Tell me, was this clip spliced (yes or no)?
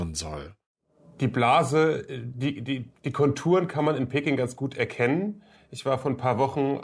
no